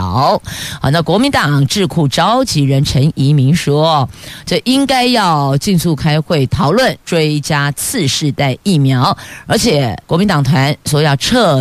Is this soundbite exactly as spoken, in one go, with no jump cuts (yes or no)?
no